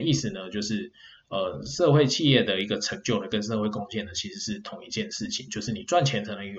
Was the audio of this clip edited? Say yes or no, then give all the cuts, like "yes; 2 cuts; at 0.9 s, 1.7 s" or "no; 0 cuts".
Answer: no; 0 cuts